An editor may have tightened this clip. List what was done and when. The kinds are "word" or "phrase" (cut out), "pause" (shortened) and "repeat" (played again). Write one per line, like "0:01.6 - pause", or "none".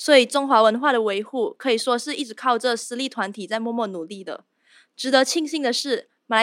none